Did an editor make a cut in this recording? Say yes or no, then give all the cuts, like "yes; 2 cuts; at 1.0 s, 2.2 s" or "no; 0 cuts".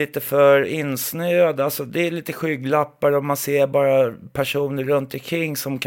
no; 0 cuts